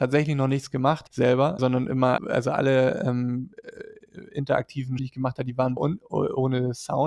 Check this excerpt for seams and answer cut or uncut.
cut